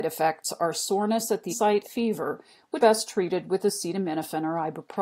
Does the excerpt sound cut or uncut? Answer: cut